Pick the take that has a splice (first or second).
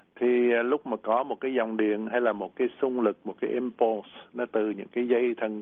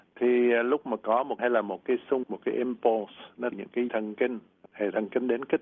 second